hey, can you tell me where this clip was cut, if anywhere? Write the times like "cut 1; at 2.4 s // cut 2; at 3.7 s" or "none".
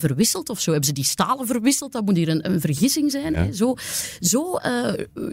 none